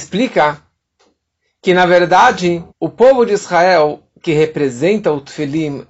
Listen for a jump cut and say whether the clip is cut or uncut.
cut